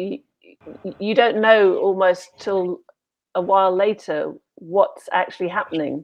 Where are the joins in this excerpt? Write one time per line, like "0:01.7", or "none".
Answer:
none